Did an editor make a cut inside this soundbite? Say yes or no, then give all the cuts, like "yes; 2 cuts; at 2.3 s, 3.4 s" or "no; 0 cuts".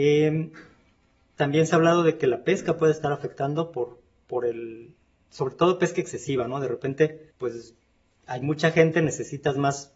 yes; 1 cut; at 7.3 s